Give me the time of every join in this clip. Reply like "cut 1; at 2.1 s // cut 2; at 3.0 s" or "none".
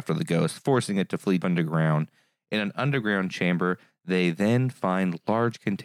cut 1; at 1.4 s